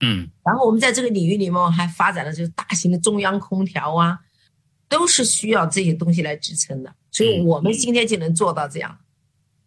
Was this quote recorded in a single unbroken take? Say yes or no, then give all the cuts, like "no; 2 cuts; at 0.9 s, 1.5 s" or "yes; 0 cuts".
no; 1 cut; at 7.0 s